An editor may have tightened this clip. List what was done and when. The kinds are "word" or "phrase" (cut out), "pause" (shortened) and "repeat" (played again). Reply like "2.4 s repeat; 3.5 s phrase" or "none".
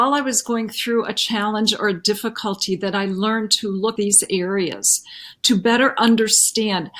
4.0 s phrase